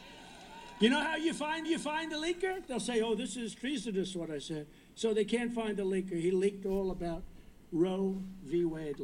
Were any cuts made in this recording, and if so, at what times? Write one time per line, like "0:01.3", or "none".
0:01.6